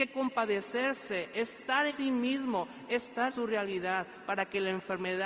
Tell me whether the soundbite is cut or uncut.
cut